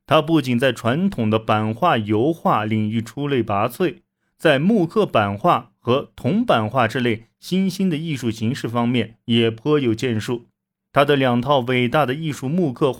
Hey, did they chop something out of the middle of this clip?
no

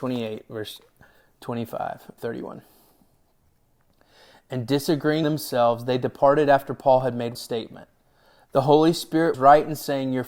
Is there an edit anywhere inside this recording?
yes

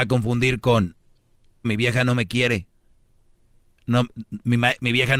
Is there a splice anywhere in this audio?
yes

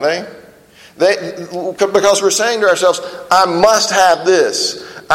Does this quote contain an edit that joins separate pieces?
no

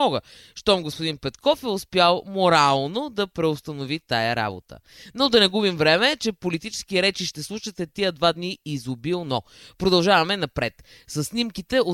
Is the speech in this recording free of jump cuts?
yes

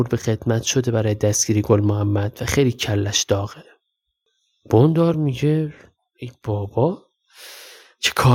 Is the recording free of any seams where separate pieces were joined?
yes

